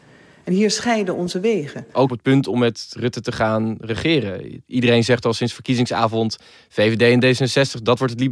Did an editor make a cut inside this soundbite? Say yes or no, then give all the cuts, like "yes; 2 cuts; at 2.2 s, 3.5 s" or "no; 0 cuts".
yes; 1 cut; at 2.1 s